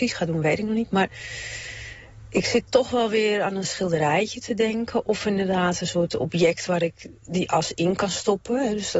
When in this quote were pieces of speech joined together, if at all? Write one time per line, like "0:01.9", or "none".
none